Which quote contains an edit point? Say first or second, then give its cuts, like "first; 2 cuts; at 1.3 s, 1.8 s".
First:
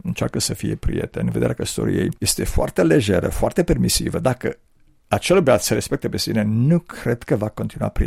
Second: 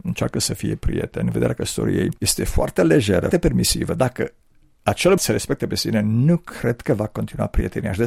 second; 2 cuts; at 3.3 s, 5.2 s